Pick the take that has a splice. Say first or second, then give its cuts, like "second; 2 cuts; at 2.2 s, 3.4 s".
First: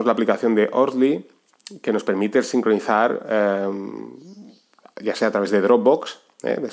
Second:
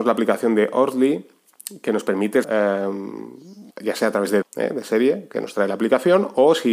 second; 3 cuts; at 2.4 s, 3.7 s, 4.4 s